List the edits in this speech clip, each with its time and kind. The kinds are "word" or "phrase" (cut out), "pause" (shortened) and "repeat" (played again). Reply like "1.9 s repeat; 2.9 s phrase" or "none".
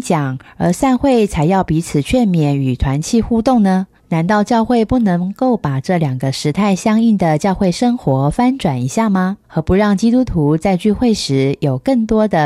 4.0 s pause; 9.4 s pause